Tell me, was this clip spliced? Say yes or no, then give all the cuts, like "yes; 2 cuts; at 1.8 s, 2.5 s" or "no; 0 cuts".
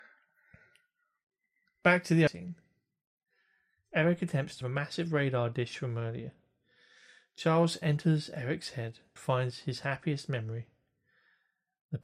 yes; 3 cuts; at 2.3 s, 4.6 s, 9.2 s